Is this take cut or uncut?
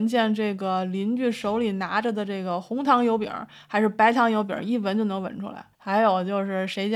cut